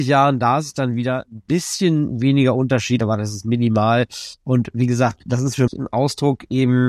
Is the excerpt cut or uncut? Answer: cut